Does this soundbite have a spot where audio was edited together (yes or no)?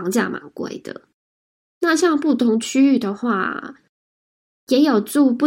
no